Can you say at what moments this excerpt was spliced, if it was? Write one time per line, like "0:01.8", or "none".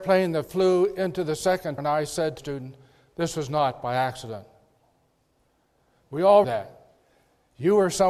0:01.8
0:02.4
0:06.4

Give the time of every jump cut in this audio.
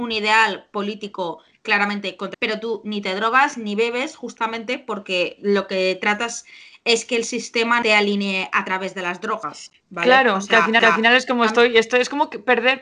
0:02.3
0:07.8
0:10.8

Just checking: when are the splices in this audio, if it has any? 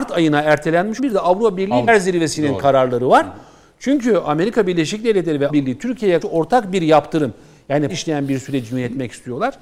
0:01.0
0:01.9
0:05.5
0:06.2
0:07.9

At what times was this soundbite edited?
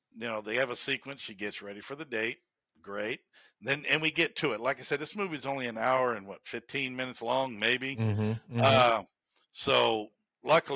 none

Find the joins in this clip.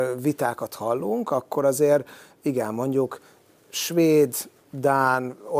none

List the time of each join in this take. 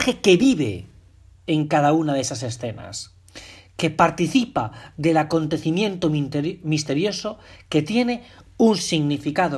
none

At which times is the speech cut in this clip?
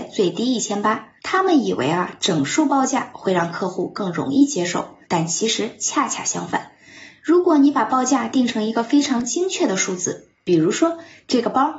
0:01.2
0:05.0

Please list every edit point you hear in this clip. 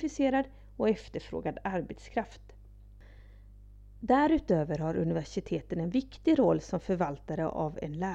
none

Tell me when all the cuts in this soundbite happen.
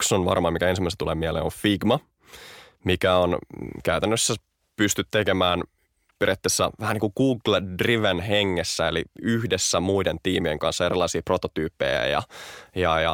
none

